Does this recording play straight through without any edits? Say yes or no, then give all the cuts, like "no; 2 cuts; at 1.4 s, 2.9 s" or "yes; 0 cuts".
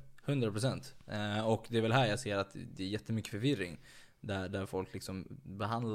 yes; 0 cuts